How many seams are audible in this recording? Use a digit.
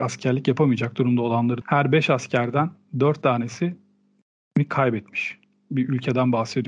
1